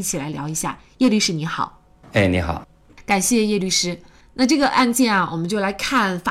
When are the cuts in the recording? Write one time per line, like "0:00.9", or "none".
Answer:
none